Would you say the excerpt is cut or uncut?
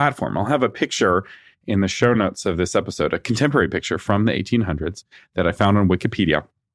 uncut